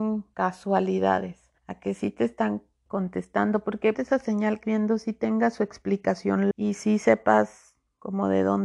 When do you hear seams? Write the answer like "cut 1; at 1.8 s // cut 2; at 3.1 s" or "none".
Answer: cut 1; at 1.6 s // cut 2; at 2.9 s // cut 3; at 3.9 s // cut 4; at 4.6 s // cut 5; at 6.5 s